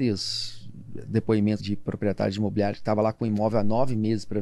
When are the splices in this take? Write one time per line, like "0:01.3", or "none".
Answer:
0:01.6